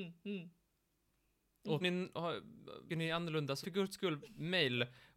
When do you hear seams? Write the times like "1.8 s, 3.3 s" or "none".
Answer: 1.8 s, 2.9 s, 3.6 s

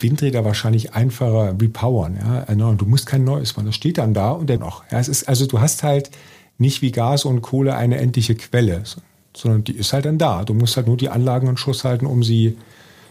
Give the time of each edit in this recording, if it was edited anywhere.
4.6 s

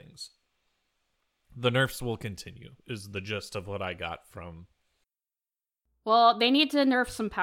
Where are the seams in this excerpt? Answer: none

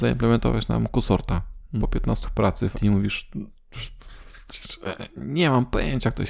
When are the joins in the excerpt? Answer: 1.8 s, 2.2 s, 2.7 s

